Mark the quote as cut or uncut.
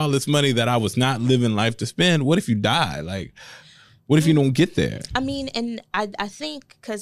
uncut